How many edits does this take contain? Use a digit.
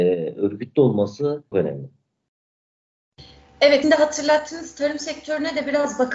2